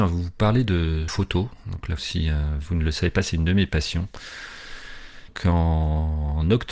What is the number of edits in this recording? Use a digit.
2